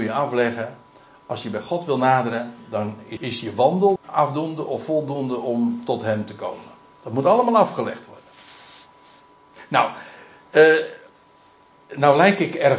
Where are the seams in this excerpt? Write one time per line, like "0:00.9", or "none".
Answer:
0:03.2
0:04.0